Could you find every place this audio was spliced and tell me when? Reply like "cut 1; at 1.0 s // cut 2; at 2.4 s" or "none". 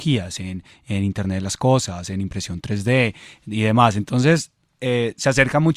none

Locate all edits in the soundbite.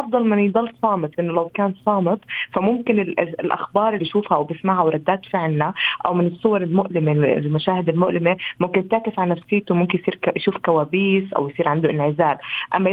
cut 1; at 1.5 s // cut 2; at 4.0 s

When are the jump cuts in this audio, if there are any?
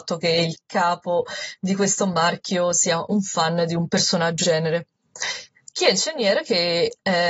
cut 1; at 4.4 s

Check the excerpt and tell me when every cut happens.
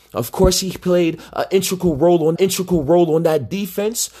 cut 1; at 2.4 s

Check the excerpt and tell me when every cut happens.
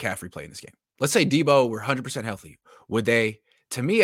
none

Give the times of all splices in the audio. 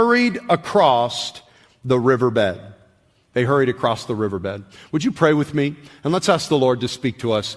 none

